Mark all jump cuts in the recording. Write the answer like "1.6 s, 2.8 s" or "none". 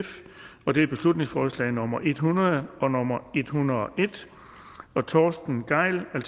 none